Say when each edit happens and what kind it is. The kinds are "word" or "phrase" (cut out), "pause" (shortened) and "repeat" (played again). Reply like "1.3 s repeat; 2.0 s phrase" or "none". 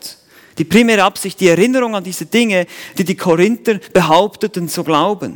none